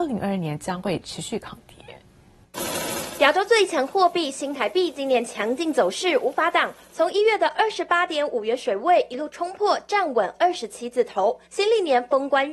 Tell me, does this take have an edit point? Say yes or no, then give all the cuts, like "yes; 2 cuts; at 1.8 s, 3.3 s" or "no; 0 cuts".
yes; 1 cut; at 11.5 s